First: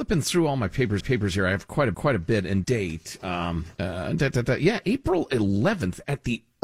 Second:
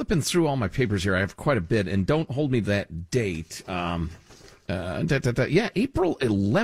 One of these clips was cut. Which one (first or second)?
first